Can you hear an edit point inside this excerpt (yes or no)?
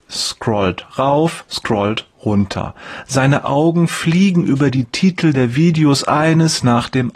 no